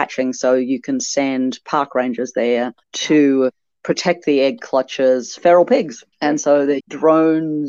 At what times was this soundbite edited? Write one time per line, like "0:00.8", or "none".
0:02.8
0:05.4
0:06.1
0:06.8

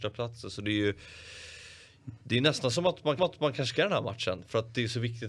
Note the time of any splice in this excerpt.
0:03.2
0:03.7

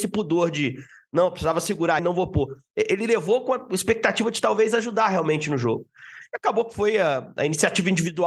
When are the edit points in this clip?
0:02.0

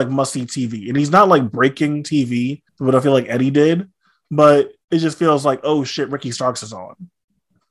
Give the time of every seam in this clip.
0:02.7
0:04.8

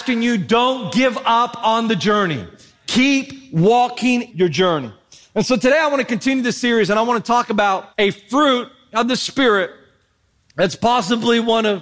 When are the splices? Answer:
0:04.3
0:07.9

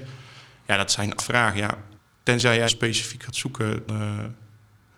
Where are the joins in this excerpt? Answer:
0:01.2
0:02.0
0:02.7
0:03.9

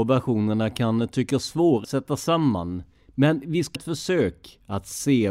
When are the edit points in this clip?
0:01.8
0:03.7

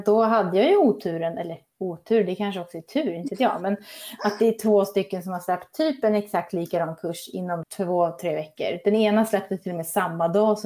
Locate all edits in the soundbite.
0:07.6

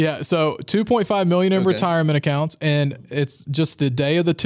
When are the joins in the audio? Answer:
none

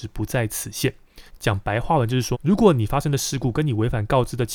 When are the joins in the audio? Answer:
0:01.3
0:02.3

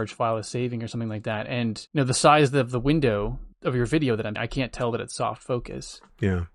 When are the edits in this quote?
0:01.9
0:03.5
0:04.4

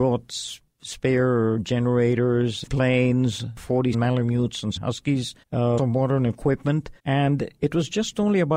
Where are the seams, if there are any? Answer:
0:02.7
0:03.9
0:04.8
0:05.4
0:05.8
0:07.0

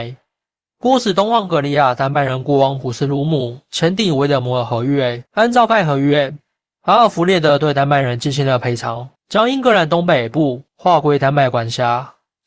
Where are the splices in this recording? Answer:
0:05.3
0:09.2
0:10.7

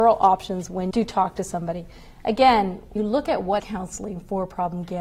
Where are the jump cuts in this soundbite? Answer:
0:00.9
0:03.0
0:03.6

